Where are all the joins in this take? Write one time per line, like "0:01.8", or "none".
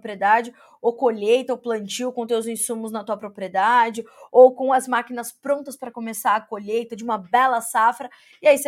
none

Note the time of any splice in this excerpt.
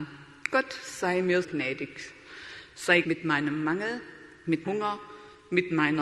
0:01.4
0:03.0
0:04.6

